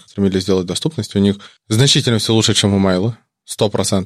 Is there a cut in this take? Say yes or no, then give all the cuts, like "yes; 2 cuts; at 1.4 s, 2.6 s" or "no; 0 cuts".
no; 0 cuts